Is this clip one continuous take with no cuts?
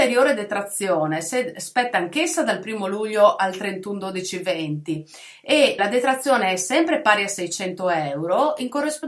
no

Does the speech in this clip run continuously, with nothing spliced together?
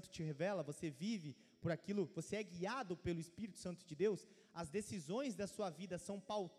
yes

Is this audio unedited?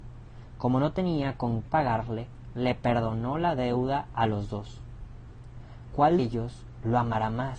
no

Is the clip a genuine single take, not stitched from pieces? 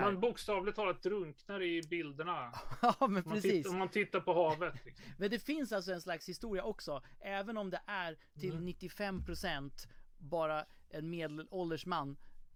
yes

